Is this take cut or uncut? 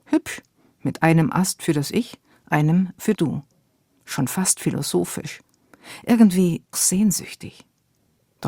cut